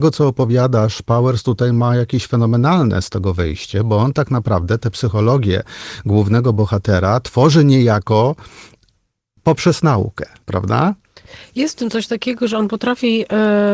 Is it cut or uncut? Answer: uncut